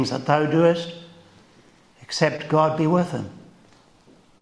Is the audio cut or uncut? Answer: uncut